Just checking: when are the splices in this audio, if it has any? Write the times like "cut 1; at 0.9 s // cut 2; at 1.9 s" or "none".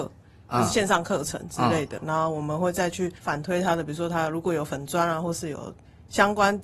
cut 1; at 3.2 s

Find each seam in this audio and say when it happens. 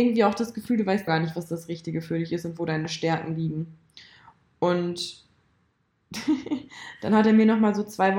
cut 1; at 1.1 s

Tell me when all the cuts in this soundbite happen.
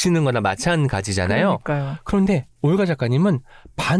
cut 1; at 2.5 s

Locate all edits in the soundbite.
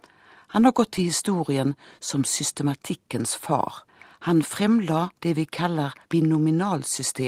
cut 1; at 3.9 s // cut 2; at 5.2 s // cut 3; at 6.0 s

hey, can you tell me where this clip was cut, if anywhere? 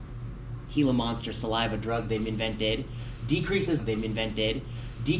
cut 1; at 3.8 s

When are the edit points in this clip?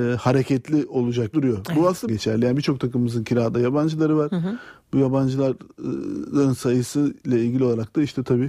cut 1; at 1.3 s // cut 2; at 2.1 s

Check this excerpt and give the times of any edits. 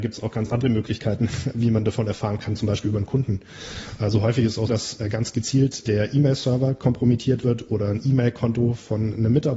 cut 1; at 4.7 s // cut 2; at 5.9 s

